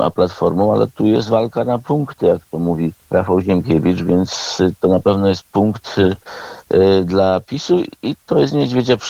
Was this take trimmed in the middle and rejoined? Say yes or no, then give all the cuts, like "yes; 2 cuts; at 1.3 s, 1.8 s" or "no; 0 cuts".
yes; 1 cut; at 3.0 s